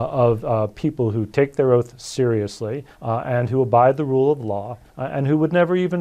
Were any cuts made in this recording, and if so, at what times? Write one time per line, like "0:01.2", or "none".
0:02.9
0:04.9